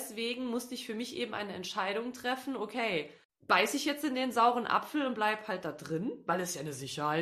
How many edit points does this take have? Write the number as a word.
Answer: one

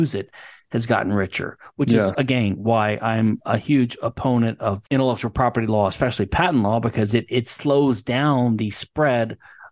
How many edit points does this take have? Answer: one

